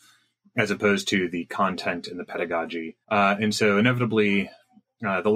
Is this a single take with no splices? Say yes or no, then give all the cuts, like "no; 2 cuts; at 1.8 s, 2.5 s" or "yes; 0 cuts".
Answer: no; 1 cut; at 3.0 s